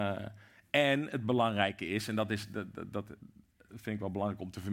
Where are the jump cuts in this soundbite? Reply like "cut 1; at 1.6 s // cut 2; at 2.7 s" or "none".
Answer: none